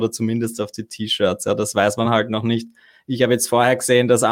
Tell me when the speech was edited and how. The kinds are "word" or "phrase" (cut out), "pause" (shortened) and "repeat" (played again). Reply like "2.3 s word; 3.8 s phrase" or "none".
none